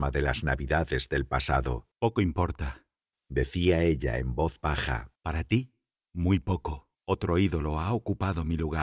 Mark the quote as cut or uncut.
cut